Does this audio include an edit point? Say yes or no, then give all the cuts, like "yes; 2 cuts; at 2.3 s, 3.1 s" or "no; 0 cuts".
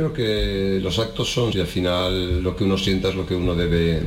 yes; 1 cut; at 1.5 s